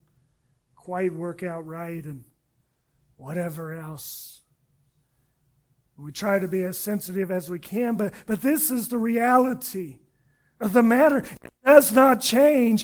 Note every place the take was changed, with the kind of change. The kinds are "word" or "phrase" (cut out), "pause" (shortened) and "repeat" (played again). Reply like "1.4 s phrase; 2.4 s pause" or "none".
none